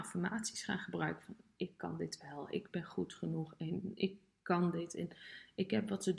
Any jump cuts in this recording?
no; 0 cuts

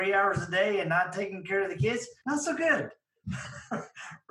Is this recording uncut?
no; 1 cut; at 2.2 s

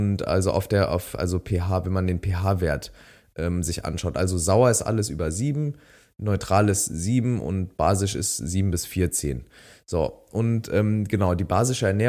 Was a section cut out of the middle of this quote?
no; 0 cuts

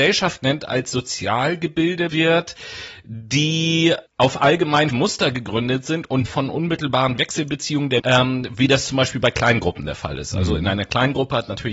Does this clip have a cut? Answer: yes; 5 cuts; at 2.1 s, 4.1 s, 4.9 s, 6.3 s, 8.0 s

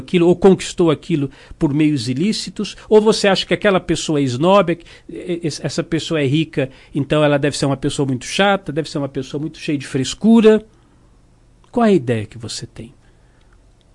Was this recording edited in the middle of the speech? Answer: no; 0 cuts

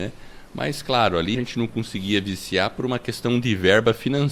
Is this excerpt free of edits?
no; 1 cut; at 1.3 s

